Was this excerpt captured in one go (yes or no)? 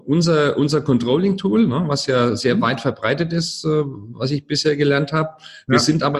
yes